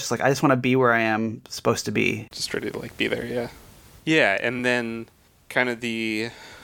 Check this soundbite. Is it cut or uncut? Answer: uncut